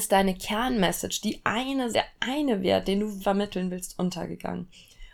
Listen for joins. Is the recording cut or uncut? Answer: cut